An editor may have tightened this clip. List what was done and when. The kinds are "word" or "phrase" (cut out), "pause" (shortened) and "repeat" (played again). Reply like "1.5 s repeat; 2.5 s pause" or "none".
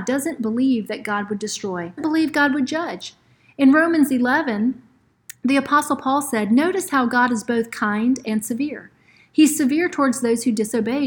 2.0 s word